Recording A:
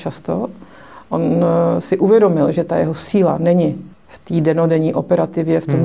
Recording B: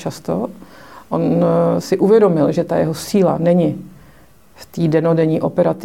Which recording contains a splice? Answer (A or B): A